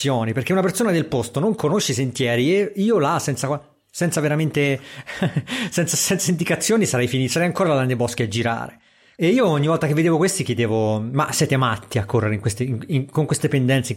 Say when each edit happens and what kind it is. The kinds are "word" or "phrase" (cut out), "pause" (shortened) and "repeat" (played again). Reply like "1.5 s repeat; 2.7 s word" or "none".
none